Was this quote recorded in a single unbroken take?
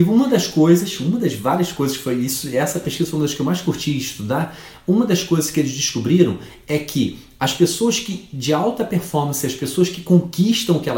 yes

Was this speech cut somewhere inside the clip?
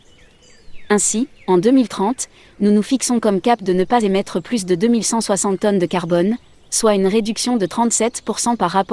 no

